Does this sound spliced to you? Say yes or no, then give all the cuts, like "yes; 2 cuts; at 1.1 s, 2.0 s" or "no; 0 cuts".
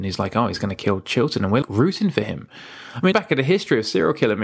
yes; 2 cuts; at 1.6 s, 3.1 s